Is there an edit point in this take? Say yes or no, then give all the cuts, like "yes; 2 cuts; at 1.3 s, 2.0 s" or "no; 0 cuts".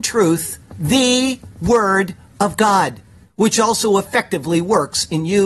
no; 0 cuts